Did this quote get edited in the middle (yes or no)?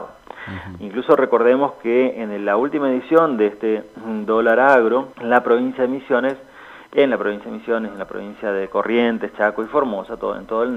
yes